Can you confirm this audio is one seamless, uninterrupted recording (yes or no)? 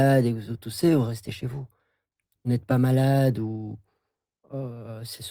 yes